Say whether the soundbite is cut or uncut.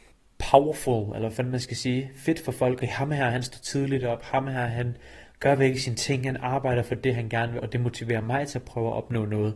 cut